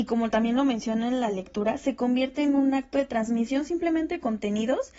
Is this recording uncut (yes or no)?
yes